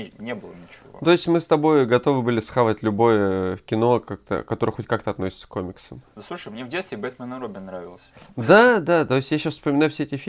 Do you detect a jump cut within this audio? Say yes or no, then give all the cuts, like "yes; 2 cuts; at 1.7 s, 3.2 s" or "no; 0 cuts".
no; 0 cuts